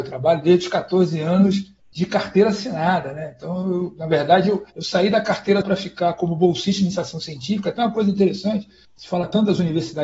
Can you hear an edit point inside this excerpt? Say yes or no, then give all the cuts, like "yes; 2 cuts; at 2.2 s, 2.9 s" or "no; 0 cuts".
yes; 4 cuts; at 1.8 s, 4.7 s, 5.6 s, 8.8 s